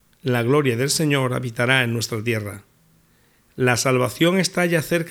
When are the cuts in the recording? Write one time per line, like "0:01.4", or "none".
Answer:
none